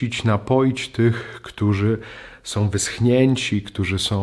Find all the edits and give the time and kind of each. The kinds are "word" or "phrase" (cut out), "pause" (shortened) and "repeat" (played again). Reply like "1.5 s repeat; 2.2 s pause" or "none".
none